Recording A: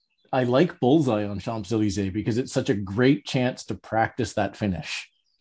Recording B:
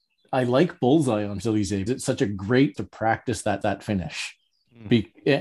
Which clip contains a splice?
B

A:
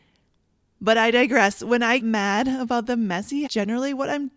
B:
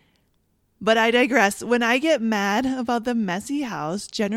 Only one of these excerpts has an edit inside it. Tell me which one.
A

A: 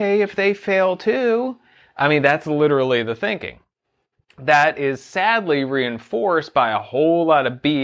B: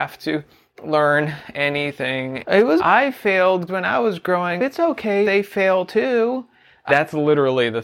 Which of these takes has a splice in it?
B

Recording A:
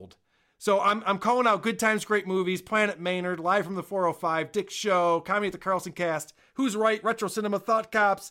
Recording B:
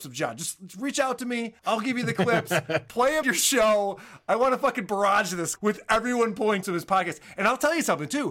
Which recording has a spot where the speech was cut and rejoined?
B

